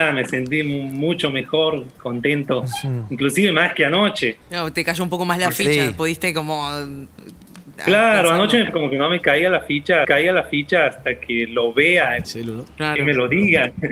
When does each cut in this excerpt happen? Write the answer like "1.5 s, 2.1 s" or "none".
2.0 s, 4.4 s, 8.7 s, 10.0 s, 12.2 s